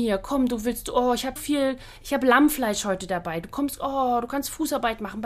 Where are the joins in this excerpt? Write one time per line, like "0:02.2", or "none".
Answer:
0:01.4